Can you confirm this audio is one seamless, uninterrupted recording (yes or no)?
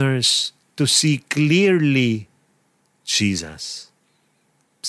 yes